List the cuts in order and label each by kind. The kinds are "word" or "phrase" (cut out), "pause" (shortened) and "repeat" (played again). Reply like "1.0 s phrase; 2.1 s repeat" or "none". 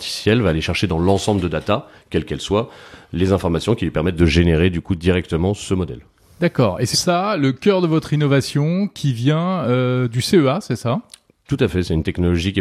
6.9 s word